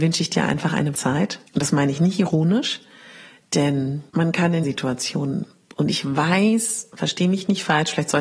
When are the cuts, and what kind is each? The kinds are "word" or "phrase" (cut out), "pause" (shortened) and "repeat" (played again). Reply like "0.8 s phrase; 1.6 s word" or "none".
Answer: 0.9 s word; 1.5 s pause; 4.1 s pause; 4.6 s word